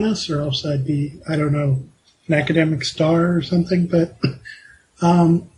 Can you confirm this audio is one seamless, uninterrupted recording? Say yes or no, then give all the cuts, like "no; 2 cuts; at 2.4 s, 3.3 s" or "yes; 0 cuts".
yes; 0 cuts